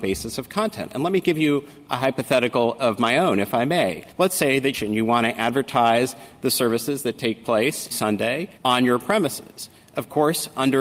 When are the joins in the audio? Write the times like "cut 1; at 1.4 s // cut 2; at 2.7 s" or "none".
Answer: cut 1; at 4.1 s // cut 2; at 4.7 s // cut 3; at 7.9 s // cut 4; at 8.6 s